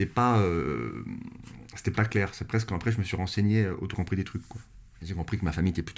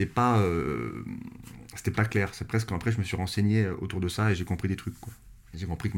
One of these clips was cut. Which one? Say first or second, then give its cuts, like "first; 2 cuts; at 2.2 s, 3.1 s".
first; 1 cut; at 3.9 s